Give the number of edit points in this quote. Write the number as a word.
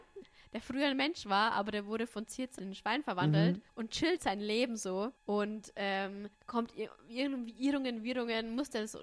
five